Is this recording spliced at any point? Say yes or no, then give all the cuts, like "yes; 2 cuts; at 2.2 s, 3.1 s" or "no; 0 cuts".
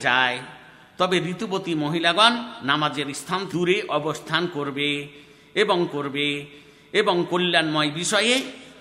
yes; 2 cuts; at 3.5 s, 5.9 s